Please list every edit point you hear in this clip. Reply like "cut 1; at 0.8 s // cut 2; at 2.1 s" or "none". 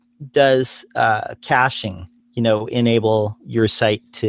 cut 1; at 2.2 s